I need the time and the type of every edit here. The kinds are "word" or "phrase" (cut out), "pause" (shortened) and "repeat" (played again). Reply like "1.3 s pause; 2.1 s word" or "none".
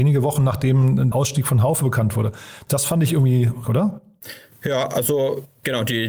1.1 s word; 3.6 s phrase